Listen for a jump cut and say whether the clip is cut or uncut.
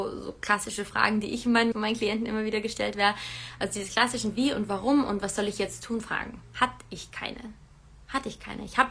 cut